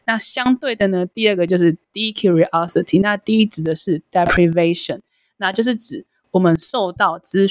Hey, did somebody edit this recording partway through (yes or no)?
no